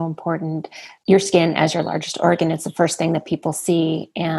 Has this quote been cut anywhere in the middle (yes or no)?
no